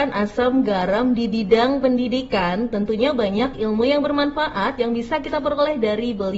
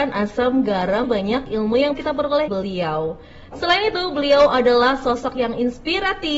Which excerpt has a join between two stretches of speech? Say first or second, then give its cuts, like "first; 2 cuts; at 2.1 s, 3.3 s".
second; 3 cuts; at 1.0 s, 1.9 s, 2.5 s